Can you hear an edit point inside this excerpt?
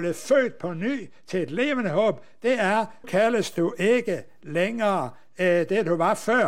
yes; 1 cut; at 3.0 s

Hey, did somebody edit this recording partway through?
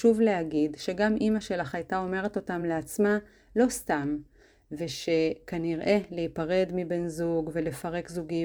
no; 0 cuts

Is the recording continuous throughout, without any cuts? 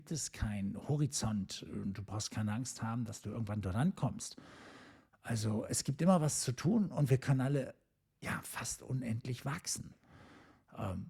yes; 0 cuts

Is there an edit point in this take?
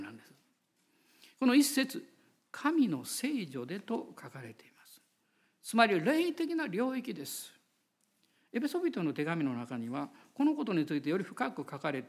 no; 0 cuts

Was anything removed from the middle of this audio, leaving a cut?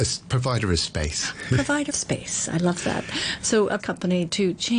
yes; 2 cuts; at 1.9 s, 3.8 s

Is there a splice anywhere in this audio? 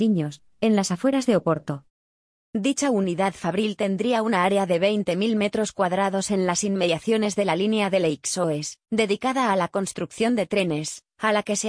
no; 0 cuts

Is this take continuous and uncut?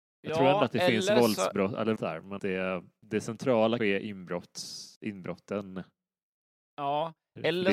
no; 4 cuts; at 2.0 s, 2.4 s, 3.8 s, 5.0 s

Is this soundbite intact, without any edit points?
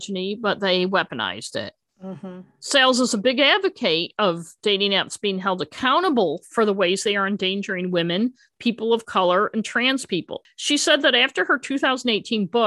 yes; 0 cuts

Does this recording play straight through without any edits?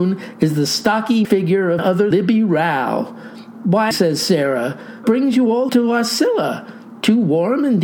no; 6 cuts; at 1.2 s, 1.8 s, 2.1 s, 3.9 s, 5.0 s, 5.7 s

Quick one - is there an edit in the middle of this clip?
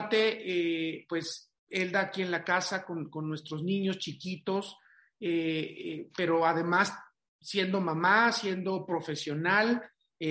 no; 0 cuts

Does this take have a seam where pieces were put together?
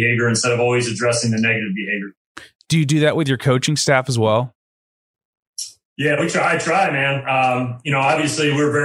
no; 0 cuts

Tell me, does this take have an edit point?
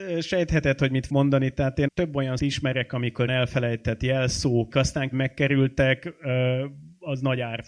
yes; 6 cuts; at 1.1 s, 1.9 s, 2.4 s, 3.3 s, 4.7 s, 5.1 s

